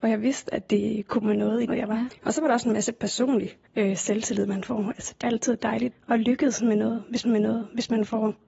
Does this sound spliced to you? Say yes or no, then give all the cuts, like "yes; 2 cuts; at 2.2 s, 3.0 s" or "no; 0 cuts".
yes; 7 cuts; at 1.2 s, 1.7 s, 2.2 s, 3.7 s, 5.2 s, 5.9 s, 7.2 s